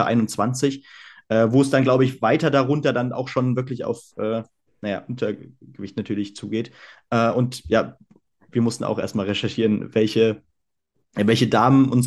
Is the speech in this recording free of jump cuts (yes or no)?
yes